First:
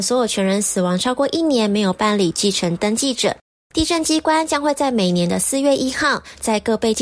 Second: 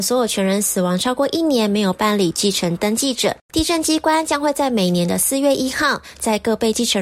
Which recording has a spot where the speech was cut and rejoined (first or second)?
second